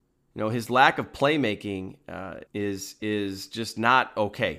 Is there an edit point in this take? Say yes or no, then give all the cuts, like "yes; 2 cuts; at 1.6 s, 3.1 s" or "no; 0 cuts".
yes; 1 cut; at 2.5 s